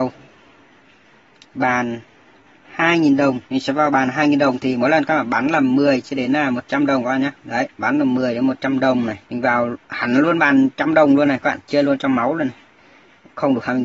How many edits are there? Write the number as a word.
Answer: four